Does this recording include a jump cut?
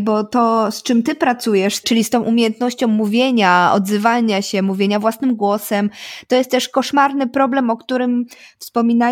no; 0 cuts

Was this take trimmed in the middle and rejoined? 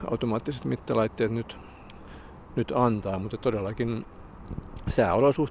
no; 0 cuts

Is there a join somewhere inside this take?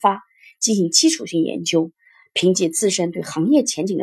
no; 0 cuts

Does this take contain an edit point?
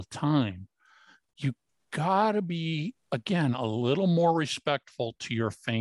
yes; 1 cut; at 3.0 s

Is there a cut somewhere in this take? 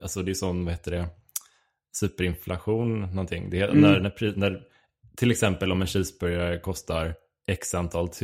no; 0 cuts

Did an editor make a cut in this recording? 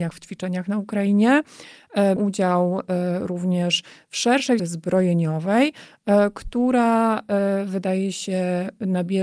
yes; 2 cuts; at 2.2 s, 4.6 s

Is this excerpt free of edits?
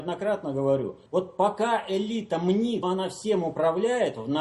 no; 2 cuts; at 1.1 s, 2.8 s

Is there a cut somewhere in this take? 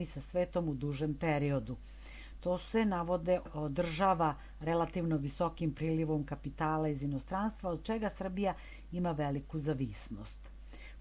no; 0 cuts

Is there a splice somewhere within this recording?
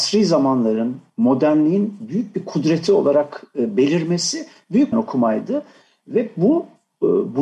yes; 1 cut; at 4.9 s

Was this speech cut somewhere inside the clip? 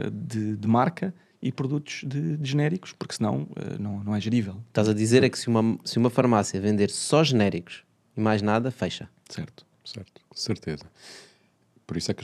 no; 0 cuts

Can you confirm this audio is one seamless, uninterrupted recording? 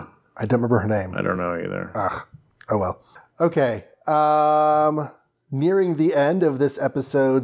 yes; 0 cuts

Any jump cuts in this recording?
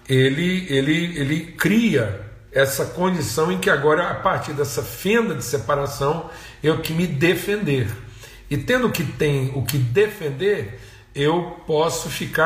yes; 2 cuts; at 2.5 s, 6.8 s

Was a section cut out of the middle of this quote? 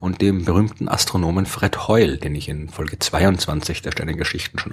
no; 0 cuts

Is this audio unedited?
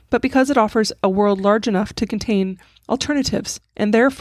yes; 0 cuts

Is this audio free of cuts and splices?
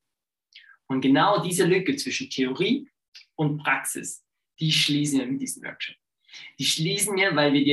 yes; 0 cuts

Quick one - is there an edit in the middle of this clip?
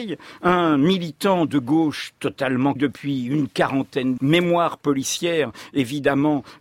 yes; 2 cuts; at 2.8 s, 4.2 s

